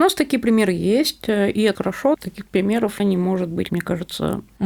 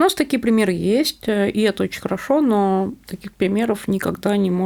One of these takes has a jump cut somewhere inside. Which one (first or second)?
first